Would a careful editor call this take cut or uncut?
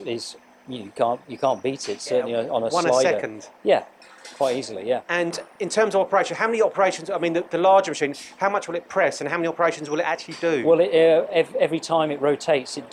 cut